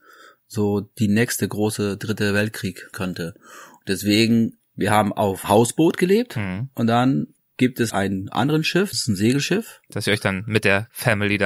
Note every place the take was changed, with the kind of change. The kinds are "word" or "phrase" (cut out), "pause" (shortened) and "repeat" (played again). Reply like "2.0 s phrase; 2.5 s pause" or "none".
2.9 s word; 5.4 s word; 7.9 s word; 8.9 s word